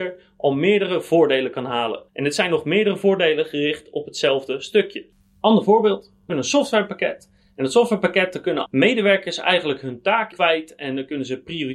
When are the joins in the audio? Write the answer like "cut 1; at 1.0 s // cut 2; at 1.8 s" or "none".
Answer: cut 1; at 2.1 s // cut 2; at 6.3 s // cut 3; at 8.7 s // cut 4; at 10.3 s